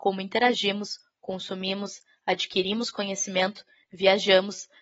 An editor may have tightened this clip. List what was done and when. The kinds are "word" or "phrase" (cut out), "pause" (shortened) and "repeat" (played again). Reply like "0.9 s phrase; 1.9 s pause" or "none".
none